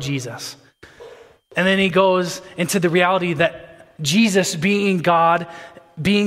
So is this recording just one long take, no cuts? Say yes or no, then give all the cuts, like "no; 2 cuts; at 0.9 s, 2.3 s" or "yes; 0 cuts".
yes; 0 cuts